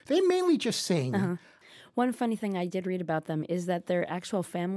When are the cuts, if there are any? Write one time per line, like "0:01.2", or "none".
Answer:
none

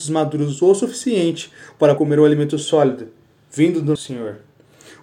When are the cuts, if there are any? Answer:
0:02.0
0:04.0

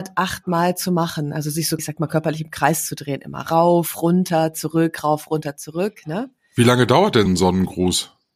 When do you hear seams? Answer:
0:01.8
0:07.3

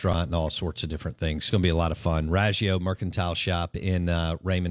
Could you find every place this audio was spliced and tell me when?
0:01.5

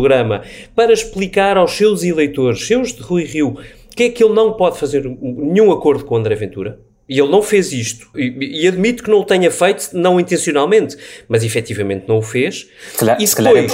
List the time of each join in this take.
0:04.0
0:08.1

